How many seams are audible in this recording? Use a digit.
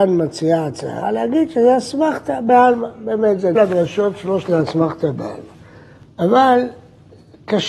2